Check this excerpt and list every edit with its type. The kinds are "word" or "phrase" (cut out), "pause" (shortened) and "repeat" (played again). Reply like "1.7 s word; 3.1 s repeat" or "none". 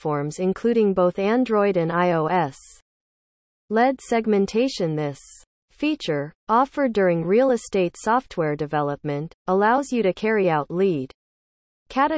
none